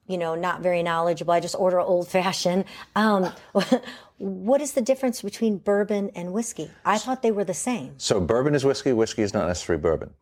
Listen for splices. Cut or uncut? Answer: uncut